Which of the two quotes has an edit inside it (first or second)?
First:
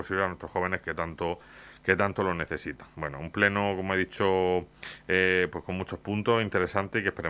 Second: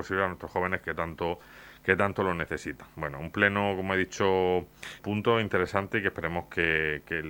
second